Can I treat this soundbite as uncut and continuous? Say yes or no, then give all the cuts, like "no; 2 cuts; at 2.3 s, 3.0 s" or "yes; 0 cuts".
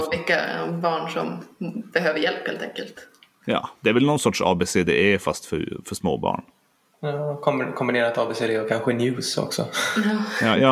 yes; 0 cuts